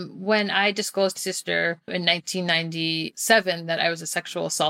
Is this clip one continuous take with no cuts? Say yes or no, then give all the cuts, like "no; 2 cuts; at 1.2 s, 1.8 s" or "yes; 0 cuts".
no; 2 cuts; at 1.2 s, 1.9 s